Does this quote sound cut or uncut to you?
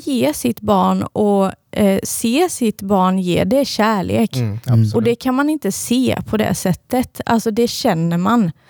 uncut